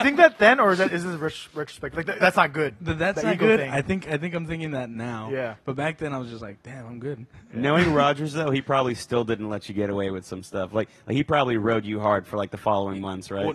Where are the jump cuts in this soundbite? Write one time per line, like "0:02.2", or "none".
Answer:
0:02.2

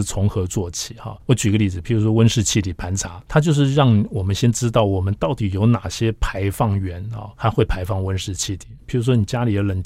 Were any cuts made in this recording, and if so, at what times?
0:01.2
0:03.2
0:07.4

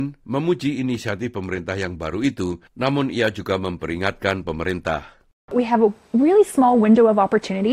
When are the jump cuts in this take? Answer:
0:02.7

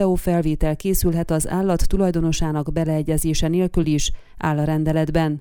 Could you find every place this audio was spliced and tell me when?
none

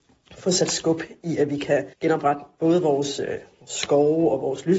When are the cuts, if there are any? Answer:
0:01.9

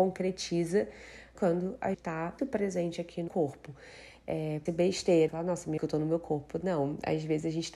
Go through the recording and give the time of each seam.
0:01.3
0:01.9
0:02.4
0:03.3
0:04.7
0:05.3
0:05.8

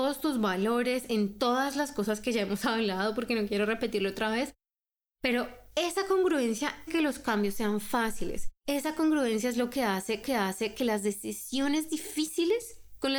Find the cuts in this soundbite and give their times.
0:06.9
0:08.6
0:10.2

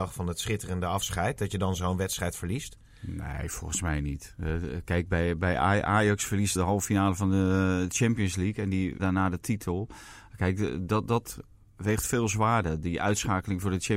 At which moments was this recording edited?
0:06.6
0:09.0

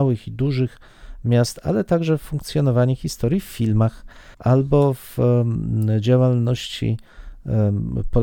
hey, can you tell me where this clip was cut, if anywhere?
0:04.3

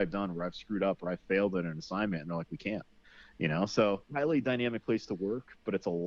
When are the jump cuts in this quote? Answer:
0:04.0

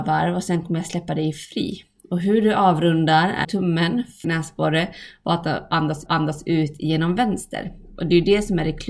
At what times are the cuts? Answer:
0:03.4
0:04.2
0:06.1

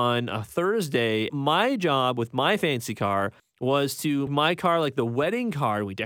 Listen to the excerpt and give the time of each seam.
0:01.3
0:03.4
0:04.3

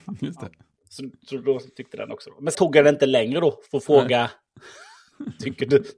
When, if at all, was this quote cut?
0:02.5

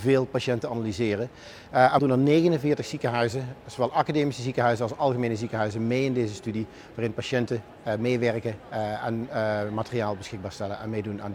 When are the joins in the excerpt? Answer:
0:02.0

